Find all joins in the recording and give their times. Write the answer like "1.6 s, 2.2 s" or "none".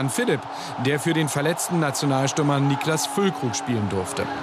none